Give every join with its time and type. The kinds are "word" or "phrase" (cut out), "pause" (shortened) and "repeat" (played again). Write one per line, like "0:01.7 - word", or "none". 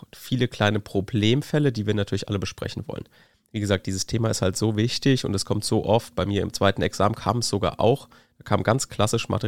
none